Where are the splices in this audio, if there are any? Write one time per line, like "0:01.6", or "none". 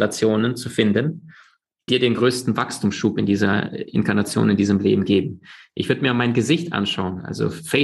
0:01.9